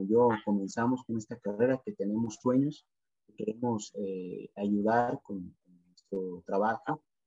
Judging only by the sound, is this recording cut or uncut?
uncut